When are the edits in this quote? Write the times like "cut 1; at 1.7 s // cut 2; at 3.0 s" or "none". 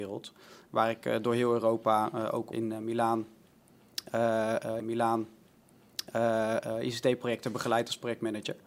cut 1; at 2.5 s // cut 2; at 4.8 s